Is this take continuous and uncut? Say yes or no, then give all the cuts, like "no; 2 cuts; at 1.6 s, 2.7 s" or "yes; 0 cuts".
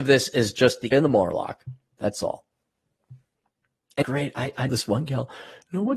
no; 3 cuts; at 0.9 s, 4.0 s, 4.7 s